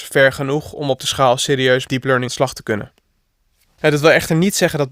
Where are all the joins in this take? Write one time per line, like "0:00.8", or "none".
0:01.0
0:01.9
0:02.3